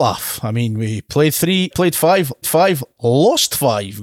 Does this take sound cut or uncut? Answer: cut